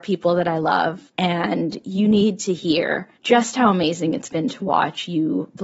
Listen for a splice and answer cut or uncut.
cut